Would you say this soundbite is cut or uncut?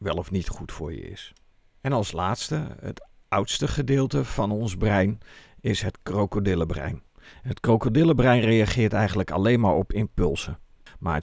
uncut